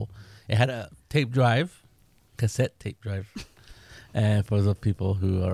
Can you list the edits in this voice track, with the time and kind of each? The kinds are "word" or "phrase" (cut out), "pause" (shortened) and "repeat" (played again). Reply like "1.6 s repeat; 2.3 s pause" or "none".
none